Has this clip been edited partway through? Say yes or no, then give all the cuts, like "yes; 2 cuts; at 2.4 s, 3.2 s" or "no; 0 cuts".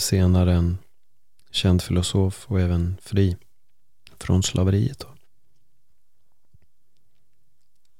no; 0 cuts